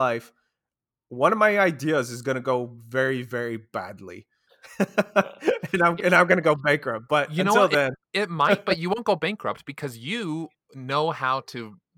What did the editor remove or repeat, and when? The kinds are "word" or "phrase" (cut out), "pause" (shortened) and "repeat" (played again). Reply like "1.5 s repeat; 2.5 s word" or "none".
none